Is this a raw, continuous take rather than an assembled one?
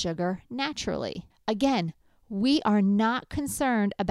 no; 1 cut; at 1.3 s

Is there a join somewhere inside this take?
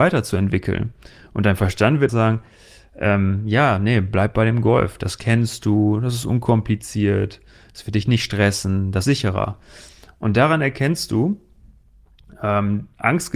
yes; 2 cuts; at 2.1 s, 9.0 s

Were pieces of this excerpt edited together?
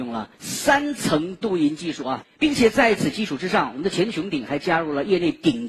no; 0 cuts

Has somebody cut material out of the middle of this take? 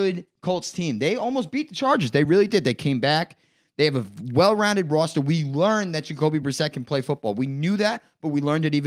no; 0 cuts

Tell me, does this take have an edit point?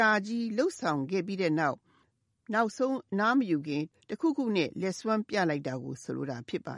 no; 0 cuts

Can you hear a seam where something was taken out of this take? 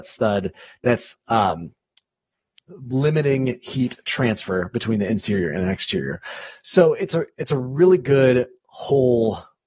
no; 0 cuts

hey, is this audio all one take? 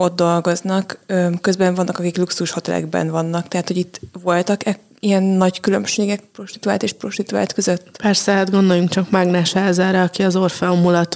yes; 0 cuts

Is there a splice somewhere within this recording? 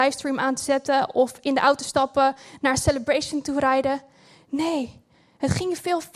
no; 0 cuts

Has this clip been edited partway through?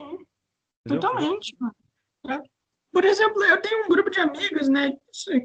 no; 0 cuts

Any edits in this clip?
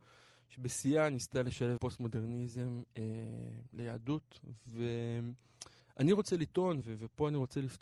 yes; 3 cuts; at 1.8 s, 5.8 s, 6.8 s

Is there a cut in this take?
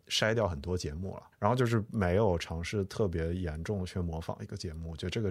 yes; 1 cut; at 1.3 s

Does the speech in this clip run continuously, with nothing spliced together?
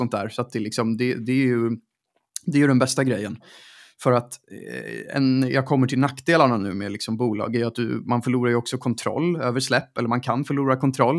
yes; 0 cuts

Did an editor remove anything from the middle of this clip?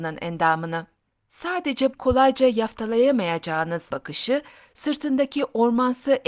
yes; 2 cuts; at 1.9 s, 3.9 s

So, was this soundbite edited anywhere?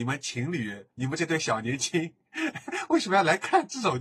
yes; 1 cut; at 0.9 s

